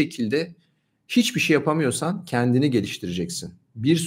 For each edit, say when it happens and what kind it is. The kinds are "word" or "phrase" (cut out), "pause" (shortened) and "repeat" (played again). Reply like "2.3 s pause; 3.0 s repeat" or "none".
none